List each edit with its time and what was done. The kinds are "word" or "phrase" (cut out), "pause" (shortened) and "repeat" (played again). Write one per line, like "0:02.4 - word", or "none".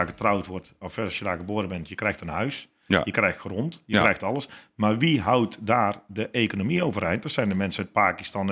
none